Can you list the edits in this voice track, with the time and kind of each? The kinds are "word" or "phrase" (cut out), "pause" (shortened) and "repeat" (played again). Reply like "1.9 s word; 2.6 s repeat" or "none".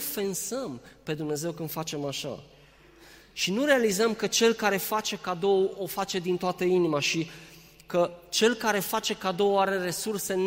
none